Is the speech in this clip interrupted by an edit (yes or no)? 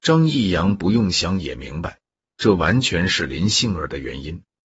no